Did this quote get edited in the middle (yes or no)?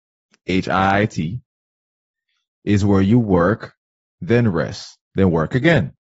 yes